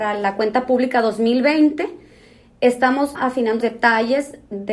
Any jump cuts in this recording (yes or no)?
yes